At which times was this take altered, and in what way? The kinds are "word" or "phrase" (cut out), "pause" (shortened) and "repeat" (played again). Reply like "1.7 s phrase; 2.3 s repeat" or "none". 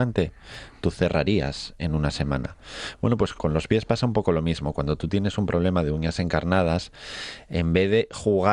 3.3 s word